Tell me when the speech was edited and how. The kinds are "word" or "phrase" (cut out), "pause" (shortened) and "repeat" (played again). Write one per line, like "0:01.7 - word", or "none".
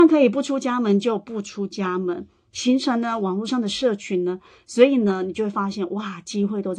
none